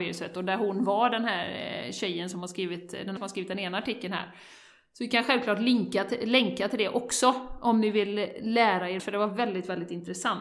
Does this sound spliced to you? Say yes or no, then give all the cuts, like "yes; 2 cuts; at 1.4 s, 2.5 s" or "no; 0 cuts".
yes; 2 cuts; at 3.2 s, 9.0 s